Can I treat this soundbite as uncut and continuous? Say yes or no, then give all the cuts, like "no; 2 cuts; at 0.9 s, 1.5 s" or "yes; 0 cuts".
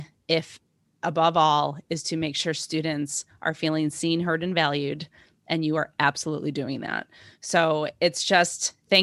yes; 0 cuts